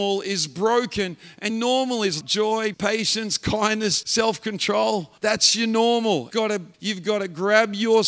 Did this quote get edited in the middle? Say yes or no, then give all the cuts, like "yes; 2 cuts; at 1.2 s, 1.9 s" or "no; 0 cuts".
yes; 7 cuts; at 1.5 s, 2.2 s, 2.7 s, 4.0 s, 5.2 s, 6.3 s, 6.7 s